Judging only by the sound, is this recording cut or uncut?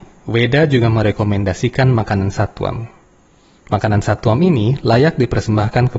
uncut